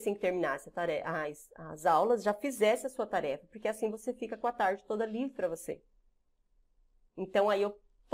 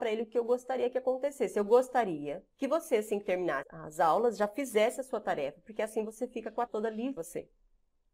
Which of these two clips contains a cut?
second; 4 cuts; at 2.5 s, 3.6 s, 6.7 s, 7.2 s

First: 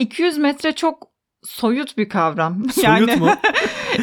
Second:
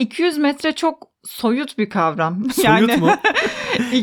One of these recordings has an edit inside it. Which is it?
second; 1 cut; at 1.1 s

